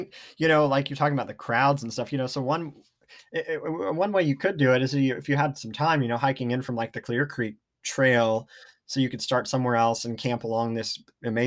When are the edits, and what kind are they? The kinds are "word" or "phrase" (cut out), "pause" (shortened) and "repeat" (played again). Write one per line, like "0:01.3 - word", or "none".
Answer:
none